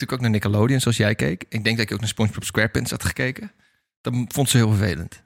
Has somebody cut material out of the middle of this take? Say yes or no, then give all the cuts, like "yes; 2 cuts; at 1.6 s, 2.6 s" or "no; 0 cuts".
no; 0 cuts